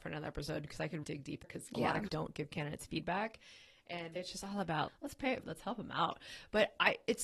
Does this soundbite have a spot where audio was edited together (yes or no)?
yes